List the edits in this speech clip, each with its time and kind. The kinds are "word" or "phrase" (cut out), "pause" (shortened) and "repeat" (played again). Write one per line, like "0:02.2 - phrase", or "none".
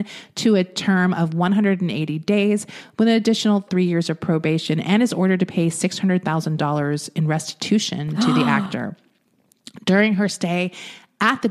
none